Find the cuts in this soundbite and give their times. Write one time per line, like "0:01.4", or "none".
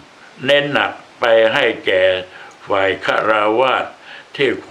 0:01.1